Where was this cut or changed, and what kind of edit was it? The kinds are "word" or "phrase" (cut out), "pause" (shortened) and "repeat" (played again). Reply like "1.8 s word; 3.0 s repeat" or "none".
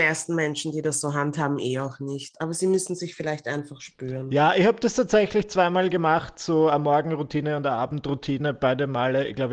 none